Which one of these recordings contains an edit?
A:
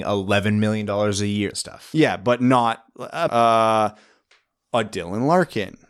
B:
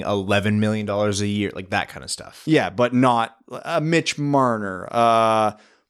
A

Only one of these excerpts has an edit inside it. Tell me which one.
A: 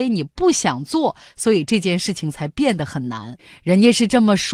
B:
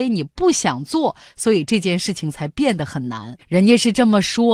B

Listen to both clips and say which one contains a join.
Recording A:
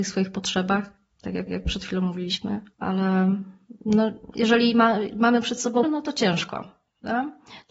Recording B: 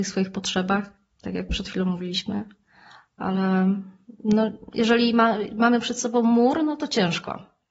A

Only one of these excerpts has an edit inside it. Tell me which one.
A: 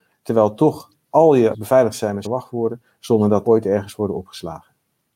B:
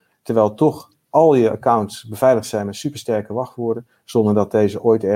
A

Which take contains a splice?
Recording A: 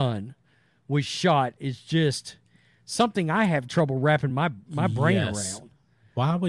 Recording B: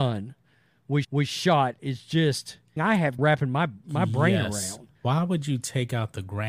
B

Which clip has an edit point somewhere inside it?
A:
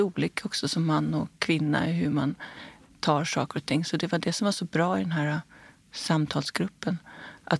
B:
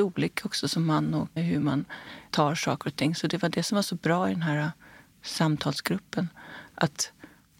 B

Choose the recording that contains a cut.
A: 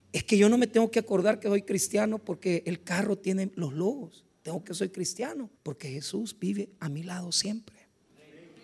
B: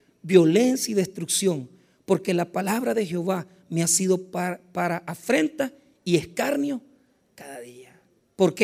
A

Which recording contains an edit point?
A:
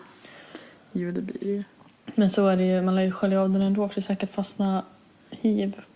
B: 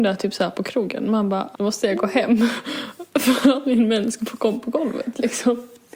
B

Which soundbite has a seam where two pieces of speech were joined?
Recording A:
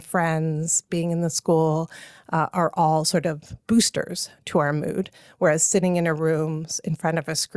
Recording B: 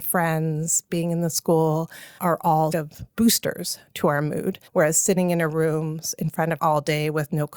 B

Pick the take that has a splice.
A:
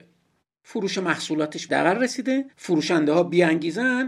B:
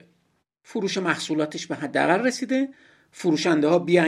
A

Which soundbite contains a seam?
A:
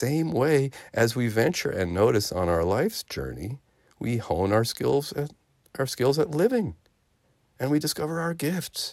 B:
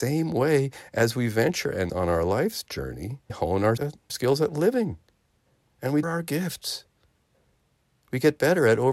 B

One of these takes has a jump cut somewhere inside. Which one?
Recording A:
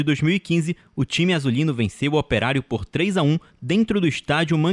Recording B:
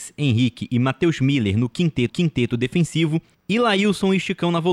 B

